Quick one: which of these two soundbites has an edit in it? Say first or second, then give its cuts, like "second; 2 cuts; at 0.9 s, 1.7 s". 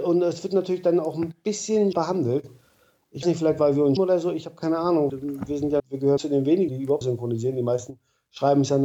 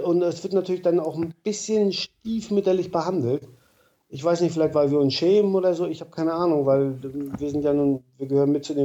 first; 8 cuts; at 1.9 s, 3.2 s, 4.0 s, 5.1 s, 5.8 s, 6.2 s, 6.7 s, 7.0 s